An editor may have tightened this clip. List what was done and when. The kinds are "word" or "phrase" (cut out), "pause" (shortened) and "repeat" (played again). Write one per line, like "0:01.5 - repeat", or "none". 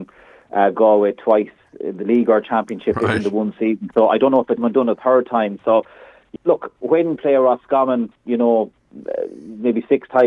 0:04.6 - word
0:06.4 - word
0:07.2 - word